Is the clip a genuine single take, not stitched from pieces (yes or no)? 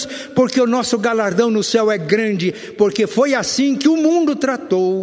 yes